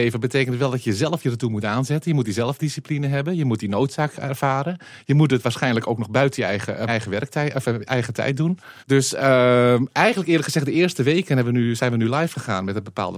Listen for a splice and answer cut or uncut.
cut